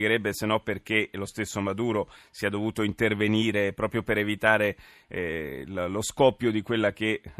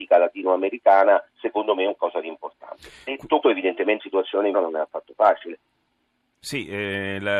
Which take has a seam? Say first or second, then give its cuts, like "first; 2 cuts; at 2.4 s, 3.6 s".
second; 5 cuts; at 1.3 s, 2.0 s, 3.4 s, 4.0 s, 4.5 s